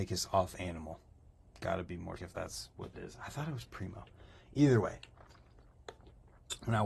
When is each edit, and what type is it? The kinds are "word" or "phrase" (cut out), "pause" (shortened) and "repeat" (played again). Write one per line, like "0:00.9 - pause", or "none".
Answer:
0:02.2 - word
0:02.9 - word